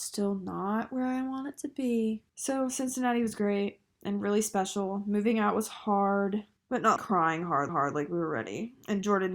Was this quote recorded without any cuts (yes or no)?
no